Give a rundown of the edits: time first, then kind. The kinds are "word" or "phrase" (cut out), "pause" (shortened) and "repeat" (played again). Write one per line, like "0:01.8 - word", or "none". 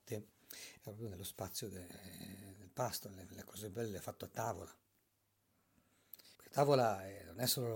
0:06.3 - pause